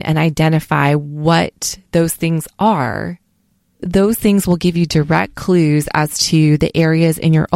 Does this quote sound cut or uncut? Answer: uncut